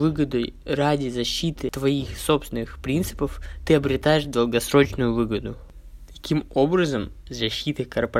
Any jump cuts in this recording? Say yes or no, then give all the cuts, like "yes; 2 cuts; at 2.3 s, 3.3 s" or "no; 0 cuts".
no; 0 cuts